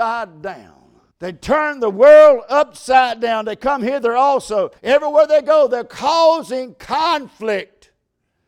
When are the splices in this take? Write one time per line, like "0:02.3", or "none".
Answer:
0:01.1
0:04.8